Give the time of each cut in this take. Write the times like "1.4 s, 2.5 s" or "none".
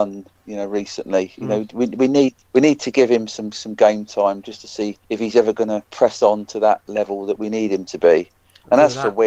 2.4 s, 5.0 s, 5.8 s